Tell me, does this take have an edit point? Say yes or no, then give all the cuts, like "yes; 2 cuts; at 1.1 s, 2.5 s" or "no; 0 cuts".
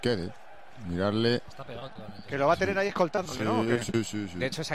no; 0 cuts